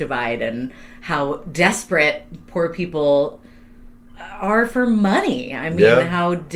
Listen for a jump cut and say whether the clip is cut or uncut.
uncut